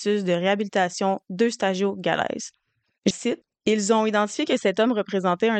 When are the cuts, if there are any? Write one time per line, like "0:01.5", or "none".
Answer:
0:03.1